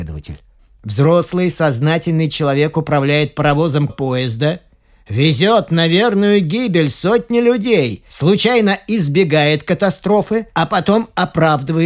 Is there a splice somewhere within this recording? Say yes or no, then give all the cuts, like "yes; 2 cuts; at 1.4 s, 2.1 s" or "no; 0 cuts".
yes; 1 cut; at 3.9 s